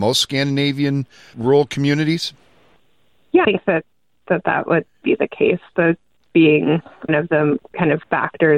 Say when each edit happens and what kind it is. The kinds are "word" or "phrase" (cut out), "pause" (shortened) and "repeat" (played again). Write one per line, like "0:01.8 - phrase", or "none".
0:01.3 - word
0:03.4 - word
0:05.0 - word
0:06.3 - word
0:07.1 - word
0:07.6 - word